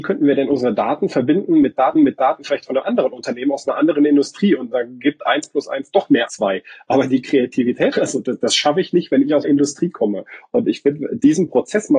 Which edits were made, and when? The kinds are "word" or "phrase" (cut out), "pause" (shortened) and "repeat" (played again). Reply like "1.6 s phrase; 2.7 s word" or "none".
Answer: 2.0 s repeat; 6.3 s word; 7.9 s phrase; 9.4 s word